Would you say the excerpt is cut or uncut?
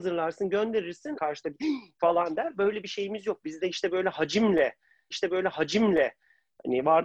cut